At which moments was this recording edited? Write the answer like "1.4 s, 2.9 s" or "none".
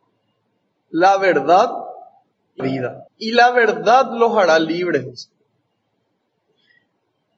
2.6 s, 3.1 s